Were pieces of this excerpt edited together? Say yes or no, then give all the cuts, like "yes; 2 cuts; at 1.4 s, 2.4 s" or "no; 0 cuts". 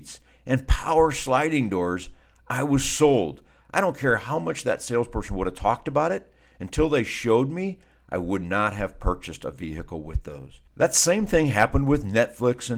no; 0 cuts